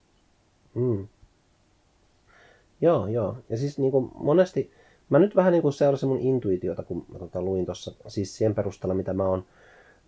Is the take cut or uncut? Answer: uncut